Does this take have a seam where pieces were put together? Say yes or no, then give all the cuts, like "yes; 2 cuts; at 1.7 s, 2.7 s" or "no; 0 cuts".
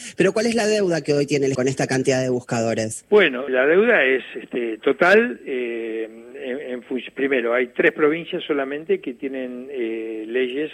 yes; 2 cuts; at 1.5 s, 3.5 s